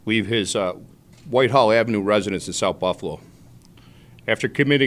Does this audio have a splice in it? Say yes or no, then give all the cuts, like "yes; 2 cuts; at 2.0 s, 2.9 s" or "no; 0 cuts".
no; 0 cuts